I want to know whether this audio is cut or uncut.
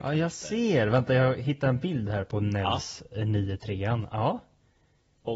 uncut